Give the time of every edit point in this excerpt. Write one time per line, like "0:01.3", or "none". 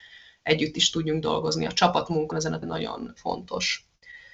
0:02.3
0:02.6